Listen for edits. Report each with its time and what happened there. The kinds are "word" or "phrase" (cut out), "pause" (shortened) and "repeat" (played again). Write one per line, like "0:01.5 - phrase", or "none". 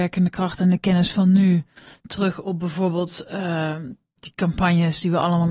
none